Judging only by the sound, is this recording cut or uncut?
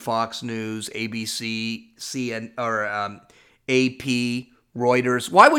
uncut